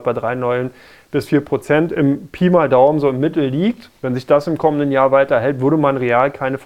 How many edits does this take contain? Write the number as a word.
one